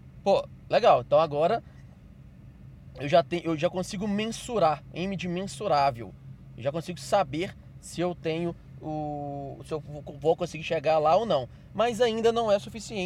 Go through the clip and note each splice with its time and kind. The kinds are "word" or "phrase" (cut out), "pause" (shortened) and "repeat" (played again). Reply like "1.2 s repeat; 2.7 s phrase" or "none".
none